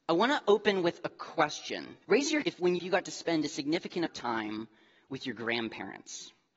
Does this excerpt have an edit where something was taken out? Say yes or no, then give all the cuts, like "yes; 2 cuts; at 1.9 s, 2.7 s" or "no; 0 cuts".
yes; 4 cuts; at 2.0 s, 2.4 s, 2.8 s, 4.1 s